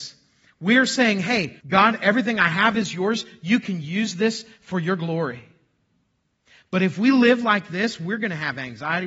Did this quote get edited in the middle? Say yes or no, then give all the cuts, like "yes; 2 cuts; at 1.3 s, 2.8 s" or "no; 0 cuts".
yes; 1 cut; at 1.6 s